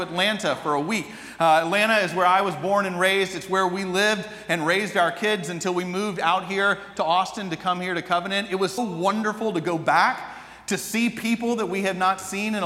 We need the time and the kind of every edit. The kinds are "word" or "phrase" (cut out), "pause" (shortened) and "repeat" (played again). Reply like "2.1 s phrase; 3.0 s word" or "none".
8.8 s word